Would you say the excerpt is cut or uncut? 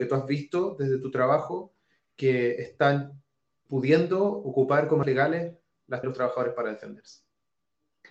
cut